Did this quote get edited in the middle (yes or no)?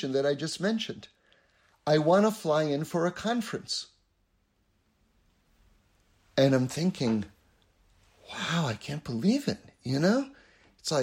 no